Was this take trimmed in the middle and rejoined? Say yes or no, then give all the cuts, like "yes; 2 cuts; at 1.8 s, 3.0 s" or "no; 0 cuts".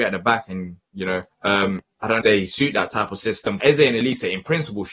yes; 3 cuts; at 1.3 s, 2.2 s, 3.6 s